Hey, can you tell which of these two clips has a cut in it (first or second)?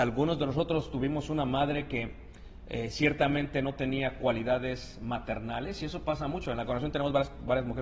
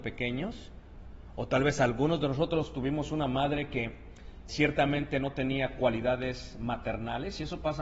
second